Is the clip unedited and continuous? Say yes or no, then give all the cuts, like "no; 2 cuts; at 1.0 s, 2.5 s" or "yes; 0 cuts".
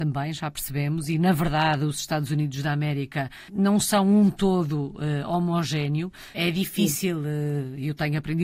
yes; 0 cuts